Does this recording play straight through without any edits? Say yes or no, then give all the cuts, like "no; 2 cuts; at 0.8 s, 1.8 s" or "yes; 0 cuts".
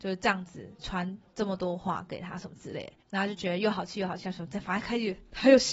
no; 1 cut; at 3.0 s